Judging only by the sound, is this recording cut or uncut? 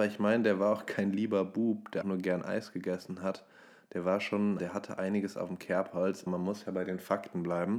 cut